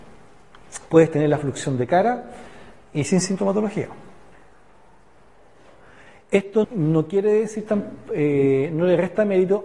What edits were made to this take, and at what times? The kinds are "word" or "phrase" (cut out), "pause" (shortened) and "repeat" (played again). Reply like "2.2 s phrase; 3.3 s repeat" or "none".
6.6 s word